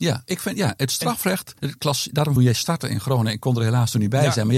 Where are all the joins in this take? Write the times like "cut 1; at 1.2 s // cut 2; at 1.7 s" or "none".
cut 1; at 1.6 s // cut 2; at 2.4 s